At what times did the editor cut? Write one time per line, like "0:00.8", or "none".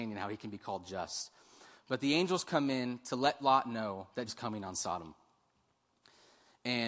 0:04.3